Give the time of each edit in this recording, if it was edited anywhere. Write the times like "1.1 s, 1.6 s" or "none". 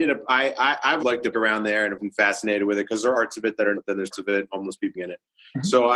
1.0 s, 1.3 s, 2.0 s, 3.1 s, 3.7 s, 4.1 s, 4.5 s, 4.9 s